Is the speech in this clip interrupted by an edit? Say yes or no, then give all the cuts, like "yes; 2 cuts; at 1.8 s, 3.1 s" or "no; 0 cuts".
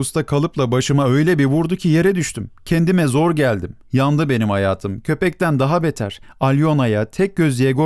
yes; 1 cut; at 3.8 s